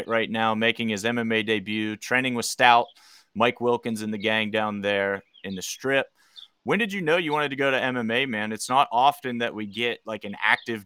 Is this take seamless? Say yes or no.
yes